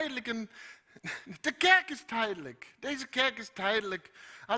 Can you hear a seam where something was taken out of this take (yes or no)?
no